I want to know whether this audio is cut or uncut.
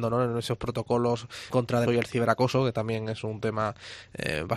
cut